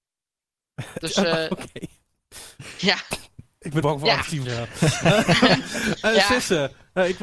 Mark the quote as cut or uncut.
cut